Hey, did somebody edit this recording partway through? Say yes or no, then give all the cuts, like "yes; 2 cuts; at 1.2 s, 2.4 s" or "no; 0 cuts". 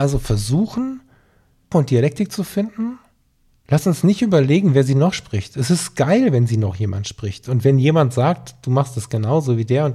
yes; 1 cut; at 1.7 s